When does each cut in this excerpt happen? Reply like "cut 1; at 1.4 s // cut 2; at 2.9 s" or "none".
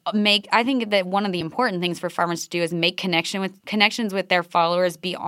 cut 1; at 3.6 s